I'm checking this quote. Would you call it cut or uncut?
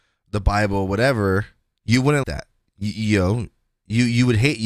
cut